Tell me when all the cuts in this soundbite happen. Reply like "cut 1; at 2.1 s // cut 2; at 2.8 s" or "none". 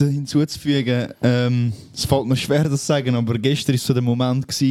none